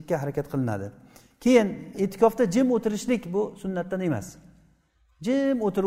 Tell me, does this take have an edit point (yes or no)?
no